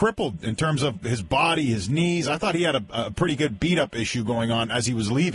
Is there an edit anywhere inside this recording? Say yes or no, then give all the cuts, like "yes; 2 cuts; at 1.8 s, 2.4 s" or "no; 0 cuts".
no; 0 cuts